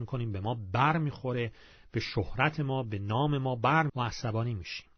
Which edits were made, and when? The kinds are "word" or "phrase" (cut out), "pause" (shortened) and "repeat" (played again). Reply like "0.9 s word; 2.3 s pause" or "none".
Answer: 3.9 s word